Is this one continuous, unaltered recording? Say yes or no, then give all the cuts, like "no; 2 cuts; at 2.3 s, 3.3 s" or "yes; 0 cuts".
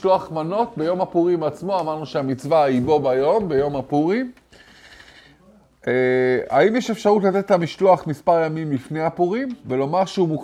yes; 0 cuts